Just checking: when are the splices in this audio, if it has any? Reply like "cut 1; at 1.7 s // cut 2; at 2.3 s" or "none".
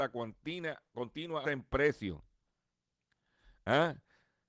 cut 1; at 1.4 s